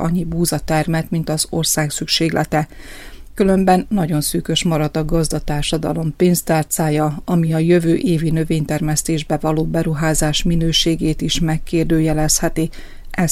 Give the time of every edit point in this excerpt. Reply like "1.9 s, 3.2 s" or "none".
none